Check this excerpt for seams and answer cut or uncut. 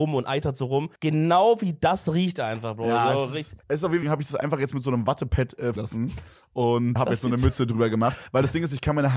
cut